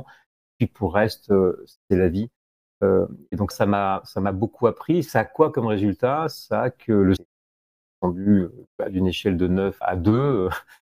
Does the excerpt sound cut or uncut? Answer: cut